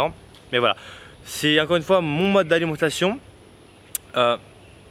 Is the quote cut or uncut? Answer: cut